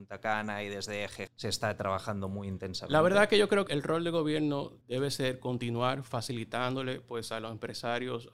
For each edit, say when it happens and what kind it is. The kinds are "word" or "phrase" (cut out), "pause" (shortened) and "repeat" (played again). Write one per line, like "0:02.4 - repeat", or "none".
0:01.3 - word
0:03.7 - word
0:04.8 - pause